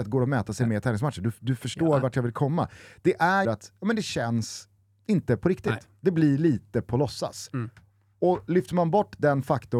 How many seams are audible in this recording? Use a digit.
1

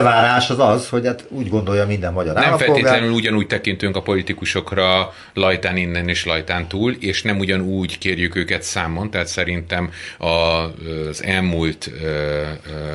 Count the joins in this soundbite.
0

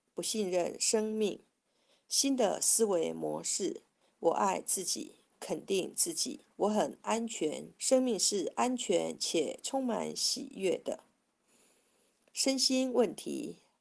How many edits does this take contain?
2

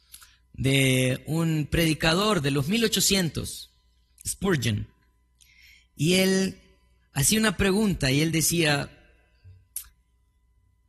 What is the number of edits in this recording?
0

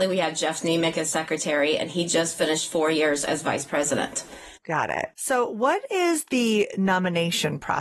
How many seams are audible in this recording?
2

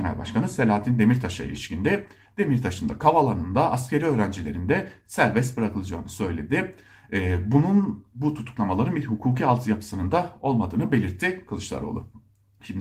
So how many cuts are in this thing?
0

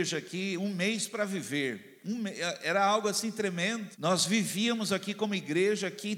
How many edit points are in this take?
1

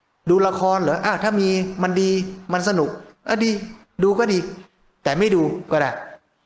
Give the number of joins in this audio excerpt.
0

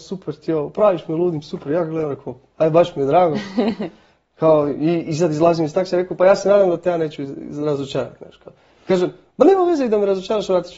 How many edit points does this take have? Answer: 0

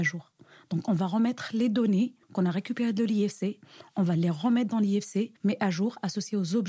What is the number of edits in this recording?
2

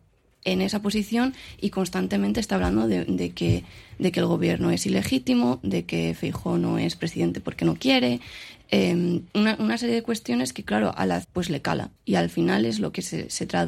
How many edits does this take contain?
4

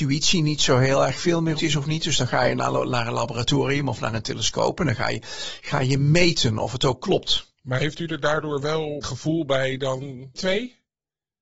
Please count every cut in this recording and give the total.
4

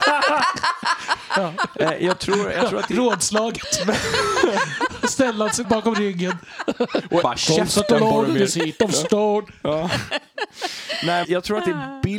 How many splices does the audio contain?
4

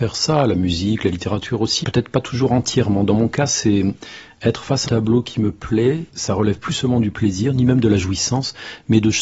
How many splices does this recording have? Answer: 3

